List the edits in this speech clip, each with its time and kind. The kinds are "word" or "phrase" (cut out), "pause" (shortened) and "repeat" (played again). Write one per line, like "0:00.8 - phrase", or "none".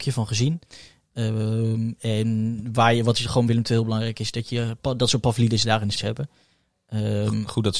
0:03.5 - word
0:05.9 - word